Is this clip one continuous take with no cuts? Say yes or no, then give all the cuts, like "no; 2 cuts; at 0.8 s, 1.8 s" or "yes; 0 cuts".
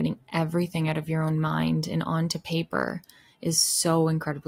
yes; 0 cuts